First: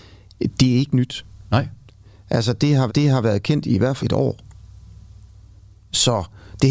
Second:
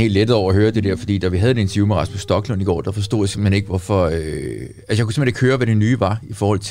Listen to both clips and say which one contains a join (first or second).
first